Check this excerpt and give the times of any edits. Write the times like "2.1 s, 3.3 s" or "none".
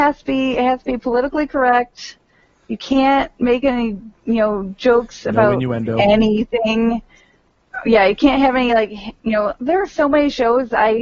none